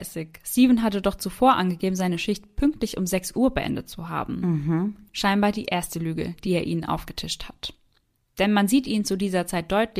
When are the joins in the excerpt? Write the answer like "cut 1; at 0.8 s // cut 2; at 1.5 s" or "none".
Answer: none